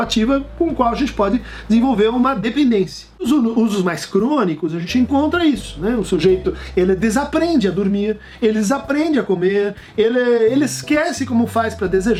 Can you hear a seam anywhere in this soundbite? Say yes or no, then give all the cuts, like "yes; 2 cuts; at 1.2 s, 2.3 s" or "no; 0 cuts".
no; 0 cuts